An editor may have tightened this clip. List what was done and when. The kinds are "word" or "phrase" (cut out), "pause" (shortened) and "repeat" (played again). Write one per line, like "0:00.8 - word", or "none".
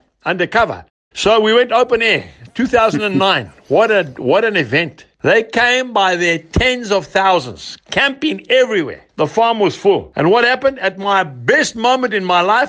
0:09.1 - pause